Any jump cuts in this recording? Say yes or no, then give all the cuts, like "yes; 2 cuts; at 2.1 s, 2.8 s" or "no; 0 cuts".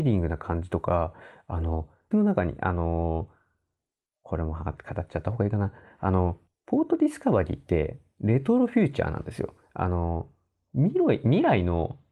yes; 2 cuts; at 2.1 s, 6.5 s